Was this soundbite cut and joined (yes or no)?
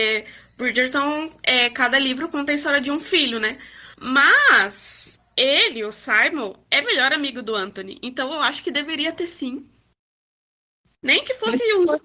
yes